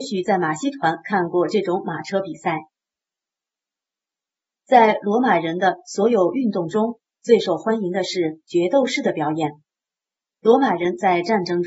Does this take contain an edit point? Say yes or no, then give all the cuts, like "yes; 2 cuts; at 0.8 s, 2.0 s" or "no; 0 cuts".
no; 0 cuts